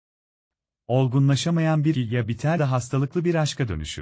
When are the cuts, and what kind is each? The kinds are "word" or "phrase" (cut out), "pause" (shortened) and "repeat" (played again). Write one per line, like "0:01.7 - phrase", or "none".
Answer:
0:01.9 - word
0:02.6 - word